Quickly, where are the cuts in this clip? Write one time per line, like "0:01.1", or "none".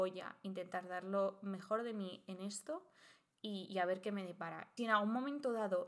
0:04.8